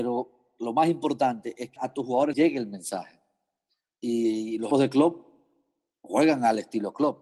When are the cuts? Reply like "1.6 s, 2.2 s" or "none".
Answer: 1.8 s, 2.3 s, 4.7 s